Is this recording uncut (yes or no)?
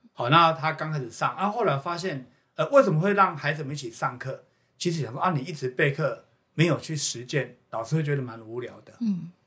yes